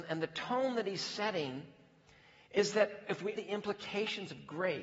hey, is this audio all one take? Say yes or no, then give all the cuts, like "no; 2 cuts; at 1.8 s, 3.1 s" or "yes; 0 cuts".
no; 1 cut; at 3.4 s